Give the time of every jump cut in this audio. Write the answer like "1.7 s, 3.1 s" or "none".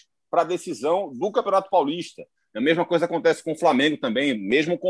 none